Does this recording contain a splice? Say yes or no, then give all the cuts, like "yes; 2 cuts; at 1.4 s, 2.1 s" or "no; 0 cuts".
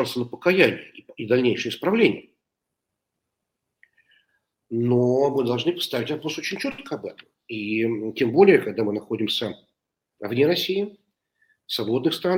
no; 0 cuts